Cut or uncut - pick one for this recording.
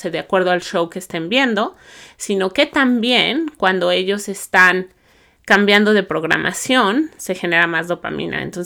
uncut